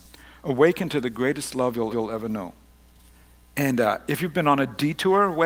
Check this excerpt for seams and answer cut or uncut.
cut